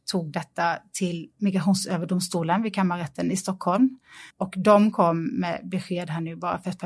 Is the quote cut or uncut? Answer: cut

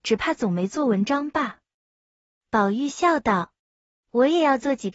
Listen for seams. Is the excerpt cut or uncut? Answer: cut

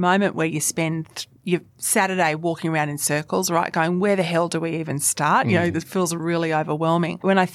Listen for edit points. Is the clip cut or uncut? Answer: cut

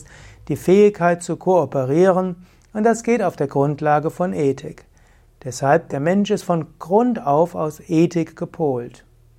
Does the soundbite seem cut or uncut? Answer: uncut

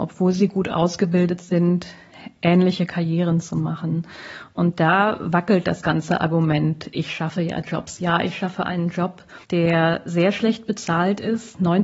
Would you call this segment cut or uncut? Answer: cut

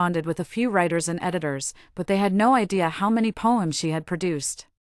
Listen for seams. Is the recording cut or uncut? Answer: uncut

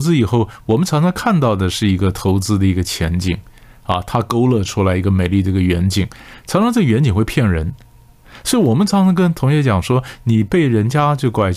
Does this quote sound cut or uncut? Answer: uncut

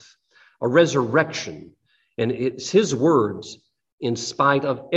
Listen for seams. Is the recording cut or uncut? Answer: uncut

